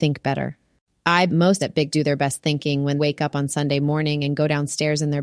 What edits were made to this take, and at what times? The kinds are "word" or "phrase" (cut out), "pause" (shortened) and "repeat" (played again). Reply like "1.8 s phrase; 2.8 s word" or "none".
1.3 s word; 1.6 s word; 1.9 s word; 3.0 s word